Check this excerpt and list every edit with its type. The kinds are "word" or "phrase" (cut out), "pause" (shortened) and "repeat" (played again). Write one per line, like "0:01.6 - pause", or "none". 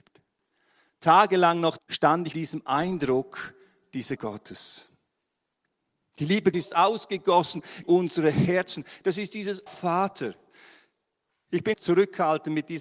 0:01.8 - word
0:02.3 - word
0:04.2 - word
0:06.5 - word
0:07.8 - word
0:09.7 - word
0:11.7 - word